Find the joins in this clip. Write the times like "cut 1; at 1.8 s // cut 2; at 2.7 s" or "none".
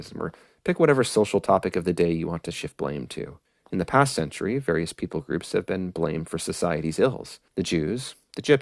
cut 1; at 3.5 s // cut 2; at 7.5 s